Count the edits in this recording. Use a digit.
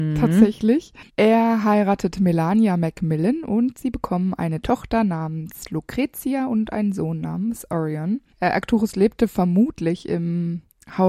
1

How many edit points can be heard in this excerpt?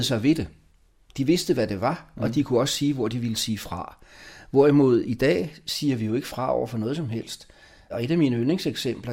0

